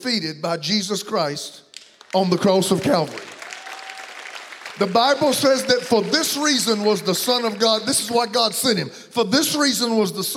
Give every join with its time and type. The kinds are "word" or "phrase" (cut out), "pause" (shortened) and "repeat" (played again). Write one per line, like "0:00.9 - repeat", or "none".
none

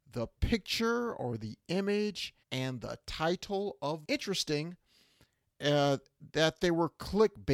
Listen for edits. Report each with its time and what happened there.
0:02.4 - pause
0:04.0 - phrase

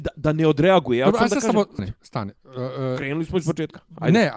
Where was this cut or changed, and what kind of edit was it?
0:01.8 - word

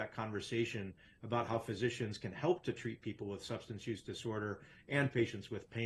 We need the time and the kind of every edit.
none

